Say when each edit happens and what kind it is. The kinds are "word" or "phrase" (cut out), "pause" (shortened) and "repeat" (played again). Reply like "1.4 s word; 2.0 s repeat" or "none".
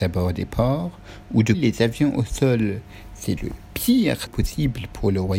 1.5 s word; 3.4 s word; 4.3 s word